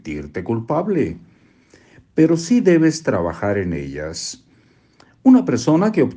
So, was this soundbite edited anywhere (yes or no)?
no